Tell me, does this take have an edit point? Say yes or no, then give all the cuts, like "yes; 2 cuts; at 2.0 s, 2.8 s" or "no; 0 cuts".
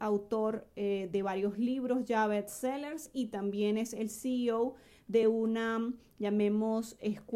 no; 0 cuts